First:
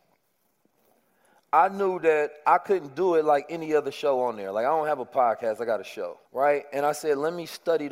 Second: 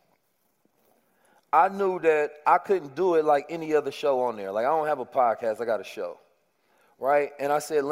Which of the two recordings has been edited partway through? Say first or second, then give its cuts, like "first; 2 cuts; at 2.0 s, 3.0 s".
first; 1 cut; at 6.3 s